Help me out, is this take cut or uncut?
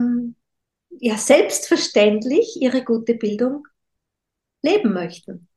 uncut